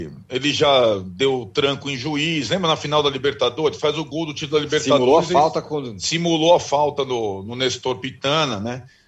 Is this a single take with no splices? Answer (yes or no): yes